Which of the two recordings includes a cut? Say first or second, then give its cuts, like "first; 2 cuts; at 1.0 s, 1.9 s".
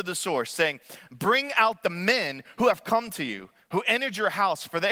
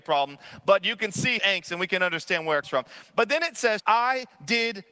second; 3 cuts; at 1.4 s, 2.6 s, 3.8 s